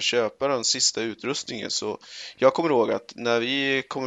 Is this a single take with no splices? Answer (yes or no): yes